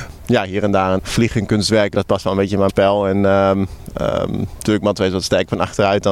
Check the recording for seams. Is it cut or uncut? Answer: cut